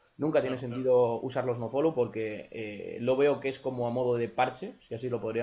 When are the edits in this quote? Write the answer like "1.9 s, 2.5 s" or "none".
none